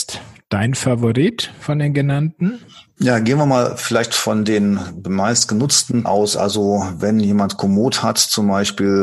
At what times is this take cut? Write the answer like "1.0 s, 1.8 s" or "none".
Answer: 6.0 s